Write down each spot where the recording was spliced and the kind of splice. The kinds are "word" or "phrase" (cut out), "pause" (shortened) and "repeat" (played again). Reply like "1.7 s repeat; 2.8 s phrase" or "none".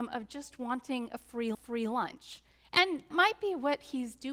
1.5 s repeat; 3.1 s word